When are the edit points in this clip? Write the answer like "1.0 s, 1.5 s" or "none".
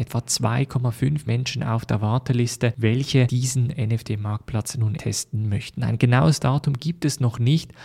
1.3 s, 5.0 s